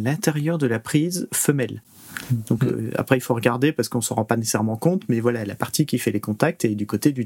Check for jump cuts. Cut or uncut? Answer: uncut